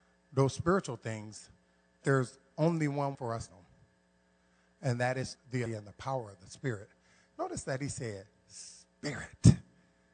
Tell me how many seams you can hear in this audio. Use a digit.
5